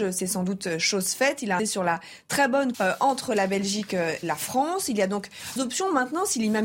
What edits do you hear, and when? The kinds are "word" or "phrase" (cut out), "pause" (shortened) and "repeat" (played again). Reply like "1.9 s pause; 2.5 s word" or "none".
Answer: 1.6 s word; 2.7 s word; 4.2 s word; 5.6 s word

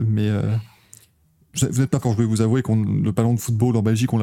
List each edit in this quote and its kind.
2.0 s word

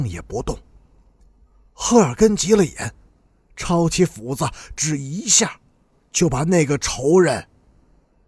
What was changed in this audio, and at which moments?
none

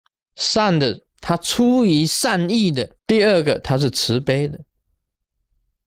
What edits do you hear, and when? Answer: 1.1 s pause; 3.0 s pause

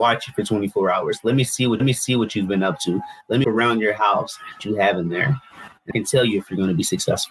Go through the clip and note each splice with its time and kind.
1.8 s repeat; 3.4 s word; 4.6 s phrase; 5.9 s word

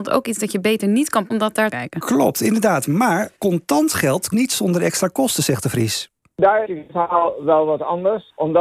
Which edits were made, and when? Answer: 1.3 s word; 1.7 s phrase; 3.4 s word; 4.3 s word; 6.6 s phrase

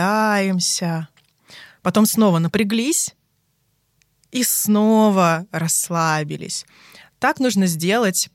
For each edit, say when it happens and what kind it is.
none

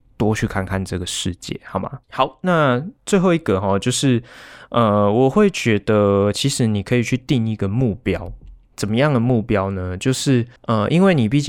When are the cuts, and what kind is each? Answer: 2.0 s pause; 3.0 s pause; 10.6 s pause

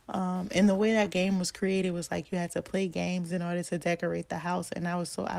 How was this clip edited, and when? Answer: none

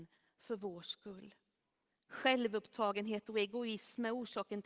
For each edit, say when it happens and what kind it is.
1.9 s pause

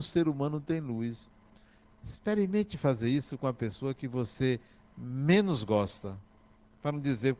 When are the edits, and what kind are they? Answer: none

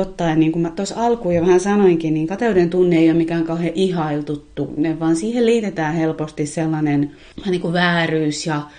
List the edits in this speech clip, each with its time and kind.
none

